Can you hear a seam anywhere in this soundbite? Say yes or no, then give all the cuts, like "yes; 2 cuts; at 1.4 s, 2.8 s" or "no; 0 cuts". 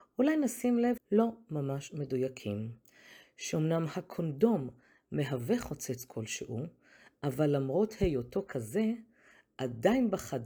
yes; 1 cut; at 1.0 s